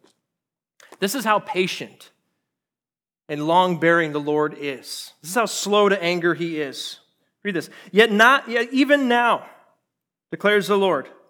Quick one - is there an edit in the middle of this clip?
no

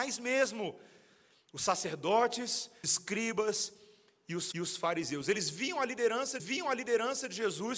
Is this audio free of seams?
no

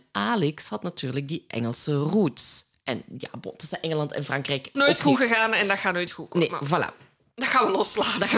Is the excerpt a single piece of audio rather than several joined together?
no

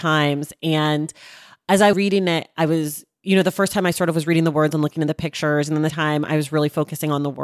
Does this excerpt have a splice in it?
yes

